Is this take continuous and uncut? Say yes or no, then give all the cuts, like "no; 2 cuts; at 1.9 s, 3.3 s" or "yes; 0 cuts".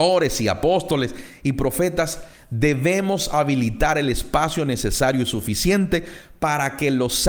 yes; 0 cuts